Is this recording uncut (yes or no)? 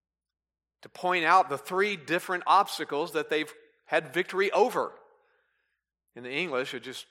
yes